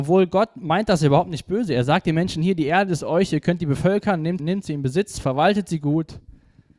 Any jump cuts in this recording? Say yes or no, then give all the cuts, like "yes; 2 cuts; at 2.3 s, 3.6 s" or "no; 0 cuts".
yes; 1 cut; at 4.4 s